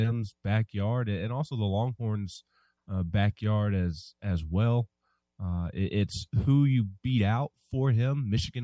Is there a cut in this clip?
no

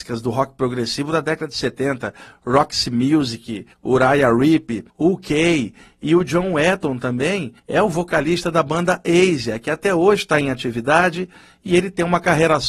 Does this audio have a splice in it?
yes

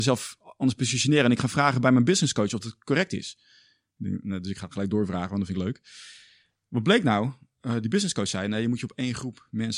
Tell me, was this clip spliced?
no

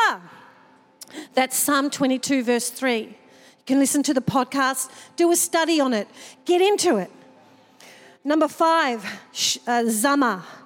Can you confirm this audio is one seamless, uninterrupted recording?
yes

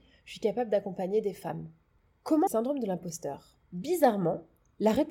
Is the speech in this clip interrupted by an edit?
yes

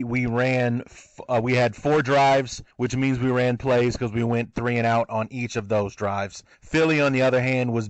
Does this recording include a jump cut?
yes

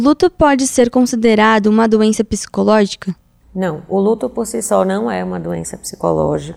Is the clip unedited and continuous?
yes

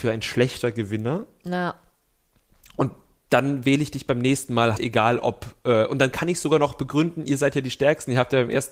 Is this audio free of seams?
no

